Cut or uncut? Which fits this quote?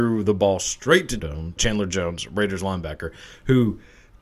cut